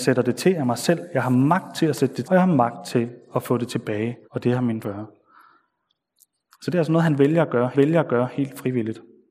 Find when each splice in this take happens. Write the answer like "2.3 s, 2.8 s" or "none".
2.2 s, 4.2 s, 4.8 s, 7.7 s